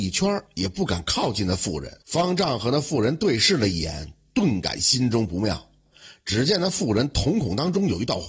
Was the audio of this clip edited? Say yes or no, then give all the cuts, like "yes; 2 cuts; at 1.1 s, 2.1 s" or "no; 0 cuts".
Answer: yes; 1 cut; at 2.0 s